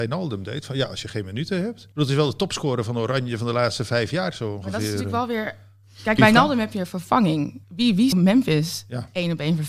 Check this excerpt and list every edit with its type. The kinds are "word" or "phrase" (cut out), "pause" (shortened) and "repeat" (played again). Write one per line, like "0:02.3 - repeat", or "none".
0:01.9 - pause
0:06.2 - phrase
0:07.6 - pause
0:08.1 - word